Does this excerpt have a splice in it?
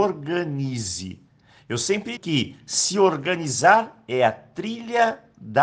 yes; 1 cut; at 2.2 s

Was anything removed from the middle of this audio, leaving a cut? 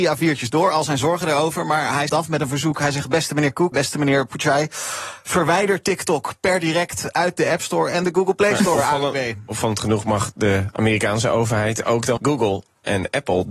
yes; 3 cuts; at 2.1 s, 3.7 s, 12.2 s

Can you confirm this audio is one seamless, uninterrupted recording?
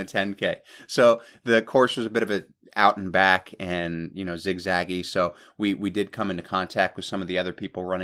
yes; 0 cuts

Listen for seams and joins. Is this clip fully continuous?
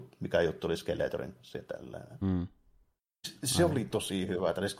yes; 0 cuts

